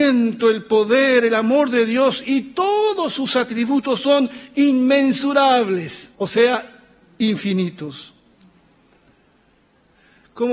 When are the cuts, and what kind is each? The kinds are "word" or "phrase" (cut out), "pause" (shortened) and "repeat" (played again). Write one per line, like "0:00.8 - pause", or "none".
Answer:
0:06.2 - pause